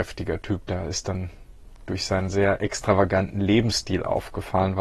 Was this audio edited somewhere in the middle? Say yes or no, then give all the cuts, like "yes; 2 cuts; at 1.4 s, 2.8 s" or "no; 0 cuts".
no; 0 cuts